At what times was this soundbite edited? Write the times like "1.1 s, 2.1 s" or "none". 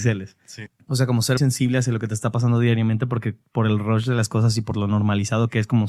1.4 s